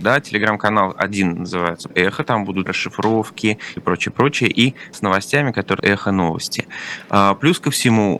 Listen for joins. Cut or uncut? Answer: cut